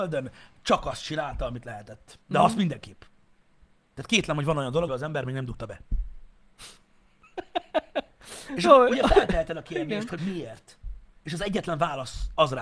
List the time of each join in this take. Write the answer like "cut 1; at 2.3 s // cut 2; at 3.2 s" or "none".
cut 1; at 4.9 s // cut 2; at 6.8 s // cut 3; at 10.2 s